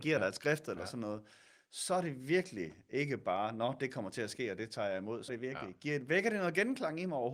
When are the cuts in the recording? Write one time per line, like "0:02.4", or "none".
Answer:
0:05.3